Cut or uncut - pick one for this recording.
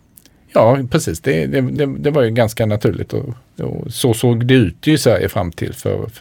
uncut